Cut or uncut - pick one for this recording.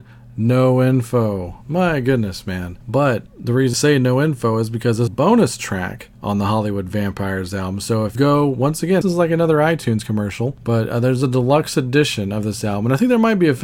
cut